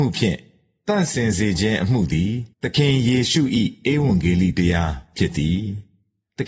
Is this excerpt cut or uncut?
cut